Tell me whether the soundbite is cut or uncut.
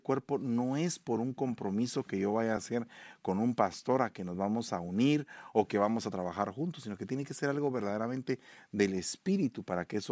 uncut